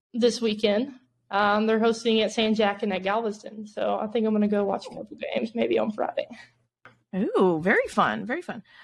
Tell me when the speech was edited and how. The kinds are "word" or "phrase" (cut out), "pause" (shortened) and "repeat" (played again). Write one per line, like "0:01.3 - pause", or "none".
none